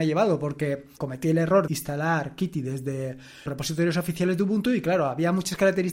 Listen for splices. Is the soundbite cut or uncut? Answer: cut